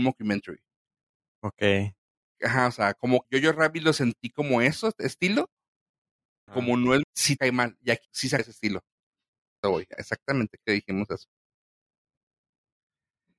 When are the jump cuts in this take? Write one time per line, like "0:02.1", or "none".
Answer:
0:03.2
0:06.5
0:07.0
0:07.4
0:08.0
0:08.4
0:09.6
0:09.9
0:10.6